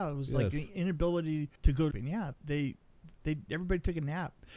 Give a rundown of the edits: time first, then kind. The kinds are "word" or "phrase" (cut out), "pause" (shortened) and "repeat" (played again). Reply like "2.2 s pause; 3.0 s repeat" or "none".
1.5 s pause; 1.9 s phrase; 2.3 s word